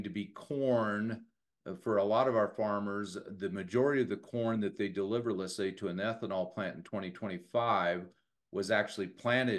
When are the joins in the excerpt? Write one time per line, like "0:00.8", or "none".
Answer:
none